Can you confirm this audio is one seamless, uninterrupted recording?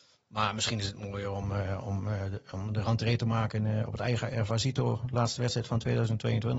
yes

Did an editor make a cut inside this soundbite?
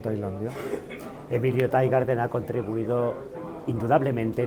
no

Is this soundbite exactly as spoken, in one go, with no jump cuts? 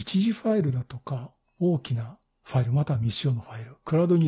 no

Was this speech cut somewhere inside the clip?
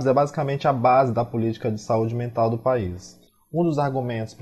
yes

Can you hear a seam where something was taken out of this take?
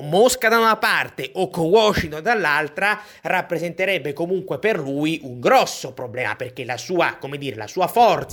no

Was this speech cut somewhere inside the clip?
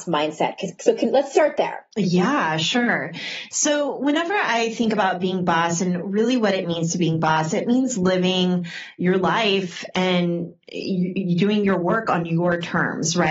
yes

